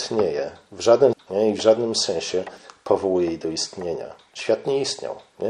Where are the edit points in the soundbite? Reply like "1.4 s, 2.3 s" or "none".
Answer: 1.1 s